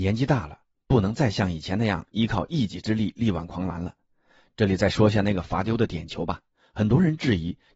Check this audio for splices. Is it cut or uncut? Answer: uncut